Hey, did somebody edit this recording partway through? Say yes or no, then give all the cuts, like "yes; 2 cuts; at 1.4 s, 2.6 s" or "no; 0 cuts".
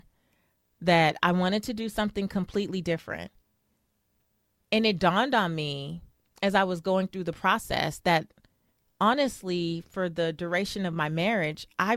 no; 0 cuts